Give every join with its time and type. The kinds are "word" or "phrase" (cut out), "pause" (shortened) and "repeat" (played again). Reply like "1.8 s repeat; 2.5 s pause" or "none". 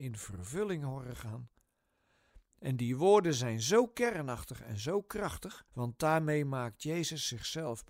5.7 s pause